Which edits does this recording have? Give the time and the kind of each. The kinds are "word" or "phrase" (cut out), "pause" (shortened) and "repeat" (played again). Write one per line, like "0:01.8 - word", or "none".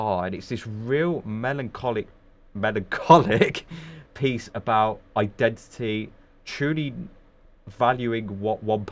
none